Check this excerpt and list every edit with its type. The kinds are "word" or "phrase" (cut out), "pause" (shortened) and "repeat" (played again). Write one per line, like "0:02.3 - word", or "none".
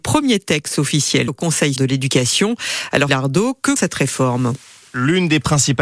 0:01.3 - phrase
0:01.8 - word
0:03.1 - word
0:03.8 - word